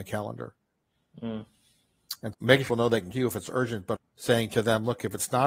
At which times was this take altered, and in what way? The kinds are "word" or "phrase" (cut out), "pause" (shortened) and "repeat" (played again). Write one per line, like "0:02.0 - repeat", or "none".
0:02.3 - word
0:02.7 - word
0:03.1 - word
0:04.0 - word